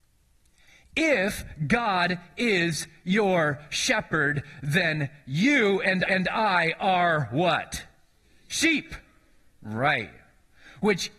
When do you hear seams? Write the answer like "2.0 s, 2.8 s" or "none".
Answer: 6.1 s